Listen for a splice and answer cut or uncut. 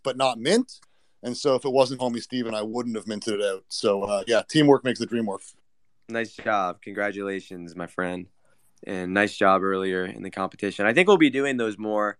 cut